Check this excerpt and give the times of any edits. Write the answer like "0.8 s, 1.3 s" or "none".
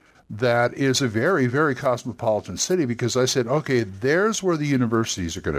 none